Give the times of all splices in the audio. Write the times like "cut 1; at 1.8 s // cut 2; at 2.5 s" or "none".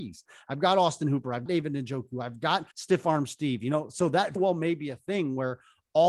cut 1; at 1.5 s // cut 2; at 2.7 s // cut 3; at 4.4 s